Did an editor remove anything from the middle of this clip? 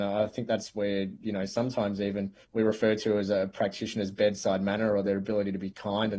yes; 1 cut; at 2.4 s

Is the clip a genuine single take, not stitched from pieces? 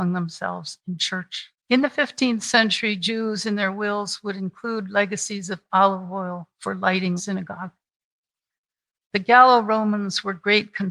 no; 2 cuts; at 1.6 s, 7.2 s

